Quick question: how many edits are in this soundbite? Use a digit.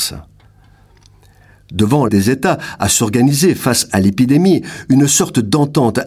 1